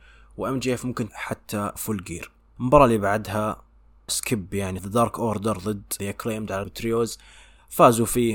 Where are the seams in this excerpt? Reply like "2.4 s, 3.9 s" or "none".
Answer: 1.1 s, 1.8 s, 2.6 s, 4.1 s, 4.8 s, 6.0 s, 6.6 s